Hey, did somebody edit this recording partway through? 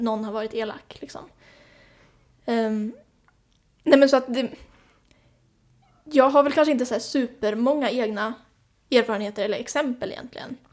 no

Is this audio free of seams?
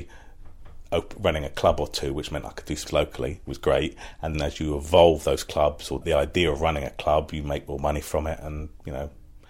no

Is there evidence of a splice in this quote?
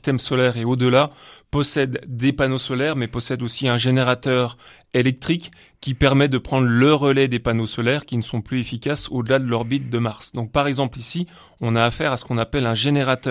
no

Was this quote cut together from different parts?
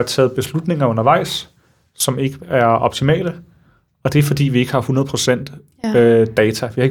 no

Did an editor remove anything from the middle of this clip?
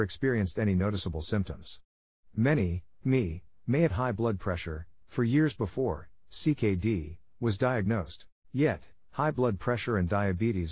yes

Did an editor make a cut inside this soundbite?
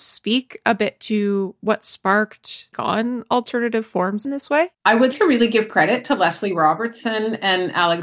yes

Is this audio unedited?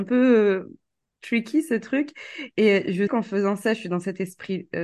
no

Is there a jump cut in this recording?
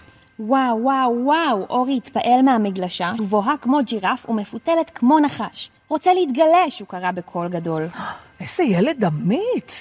yes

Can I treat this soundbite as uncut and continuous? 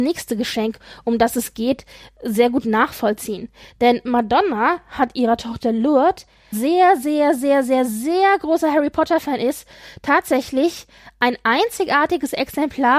no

